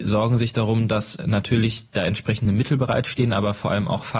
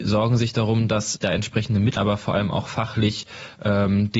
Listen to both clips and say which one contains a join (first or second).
second